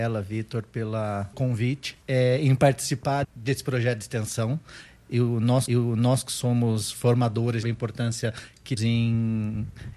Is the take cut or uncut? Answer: cut